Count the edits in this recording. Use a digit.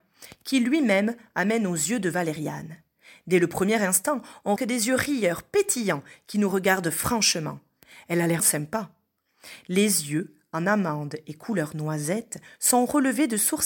2